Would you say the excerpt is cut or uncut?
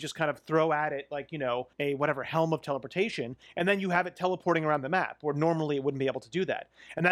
cut